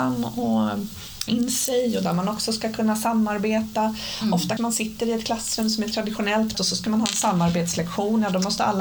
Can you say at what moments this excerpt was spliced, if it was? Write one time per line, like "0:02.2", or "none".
0:01.3
0:04.6
0:06.5